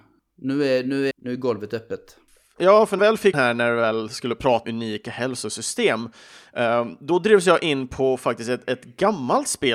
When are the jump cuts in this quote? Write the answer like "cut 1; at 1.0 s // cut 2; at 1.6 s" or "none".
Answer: cut 1; at 1.1 s // cut 2; at 3.0 s // cut 3; at 3.3 s // cut 4; at 4.6 s